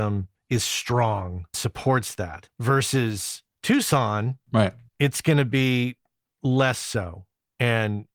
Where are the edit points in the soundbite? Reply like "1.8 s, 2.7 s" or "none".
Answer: 1.5 s